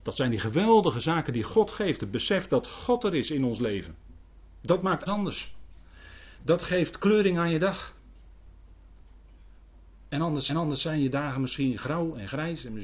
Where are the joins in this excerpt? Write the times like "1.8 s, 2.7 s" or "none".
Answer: 5.1 s, 10.5 s